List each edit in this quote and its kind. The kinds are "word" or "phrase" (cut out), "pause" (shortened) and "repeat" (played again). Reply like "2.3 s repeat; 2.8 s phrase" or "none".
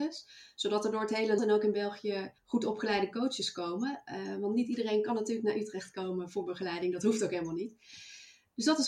1.4 s word; 2.4 s pause